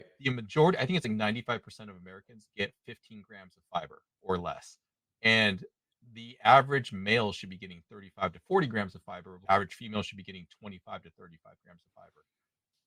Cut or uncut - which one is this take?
uncut